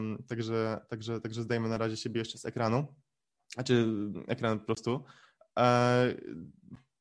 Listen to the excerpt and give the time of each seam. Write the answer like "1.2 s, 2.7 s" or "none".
none

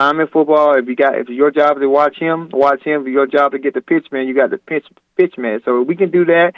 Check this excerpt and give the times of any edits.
none

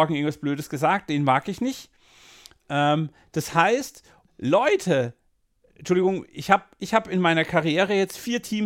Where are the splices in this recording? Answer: 4.3 s, 5.6 s

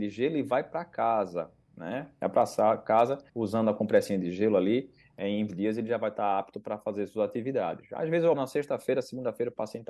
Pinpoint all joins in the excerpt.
3.3 s, 5.5 s, 8.3 s

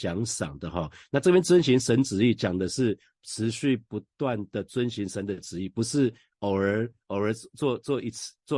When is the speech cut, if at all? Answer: none

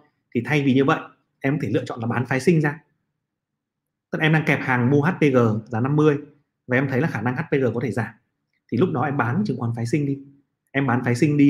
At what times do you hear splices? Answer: none

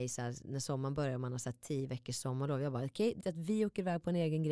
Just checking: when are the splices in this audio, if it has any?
3.2 s

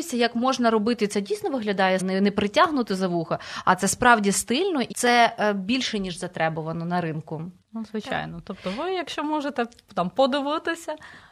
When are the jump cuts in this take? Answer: 2.0 s, 4.9 s, 7.6 s

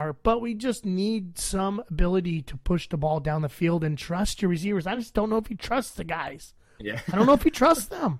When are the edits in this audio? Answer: none

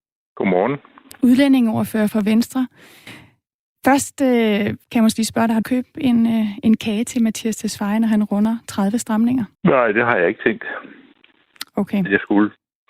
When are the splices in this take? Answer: 2.1 s, 4.8 s, 5.6 s, 9.5 s

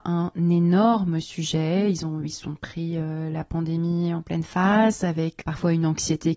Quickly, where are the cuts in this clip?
5.4 s

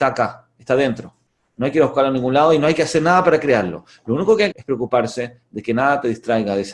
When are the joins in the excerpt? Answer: 4.5 s

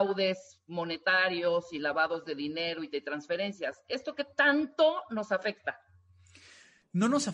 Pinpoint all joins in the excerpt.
none

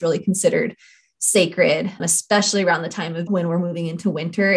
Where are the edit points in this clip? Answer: 2.0 s, 3.3 s

